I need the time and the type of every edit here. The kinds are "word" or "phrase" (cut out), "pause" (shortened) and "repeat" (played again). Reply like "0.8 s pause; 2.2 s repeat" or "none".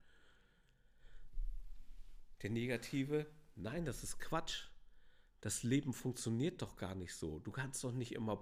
none